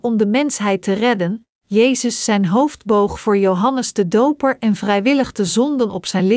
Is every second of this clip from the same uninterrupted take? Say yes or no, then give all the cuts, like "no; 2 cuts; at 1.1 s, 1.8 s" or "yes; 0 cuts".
yes; 0 cuts